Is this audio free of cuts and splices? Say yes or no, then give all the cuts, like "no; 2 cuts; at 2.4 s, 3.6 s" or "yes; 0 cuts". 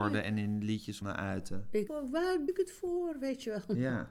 no; 3 cuts; at 1.0 s, 1.9 s, 2.5 s